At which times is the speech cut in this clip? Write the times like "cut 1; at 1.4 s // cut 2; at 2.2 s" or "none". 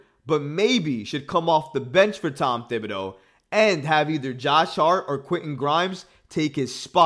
none